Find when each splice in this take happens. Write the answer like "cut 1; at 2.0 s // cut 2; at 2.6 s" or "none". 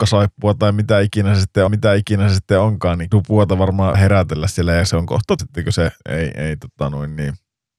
cut 1; at 1.7 s // cut 2; at 3.1 s // cut 3; at 3.9 s // cut 4; at 5.4 s // cut 5; at 6.0 s